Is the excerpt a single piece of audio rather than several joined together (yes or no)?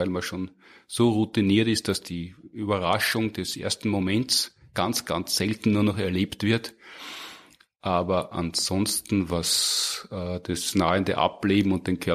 yes